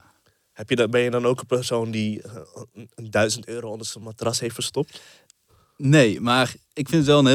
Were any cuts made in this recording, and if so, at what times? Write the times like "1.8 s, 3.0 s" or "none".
none